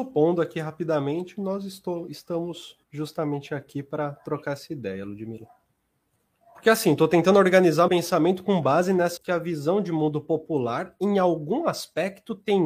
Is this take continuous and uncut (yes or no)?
no